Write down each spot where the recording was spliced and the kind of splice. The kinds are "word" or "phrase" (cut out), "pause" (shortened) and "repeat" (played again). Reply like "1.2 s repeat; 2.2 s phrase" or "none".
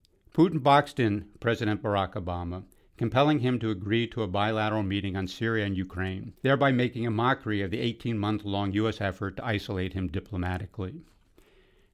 6.4 s pause